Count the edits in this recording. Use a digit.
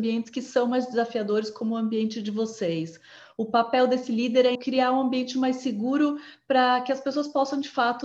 1